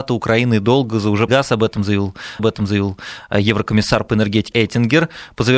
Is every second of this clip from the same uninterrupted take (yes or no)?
no